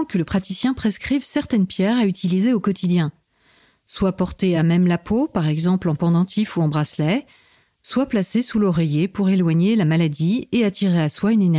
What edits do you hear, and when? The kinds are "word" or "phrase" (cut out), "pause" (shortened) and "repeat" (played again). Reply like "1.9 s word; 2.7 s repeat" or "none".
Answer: none